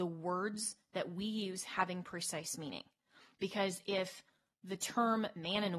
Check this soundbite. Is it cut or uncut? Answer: uncut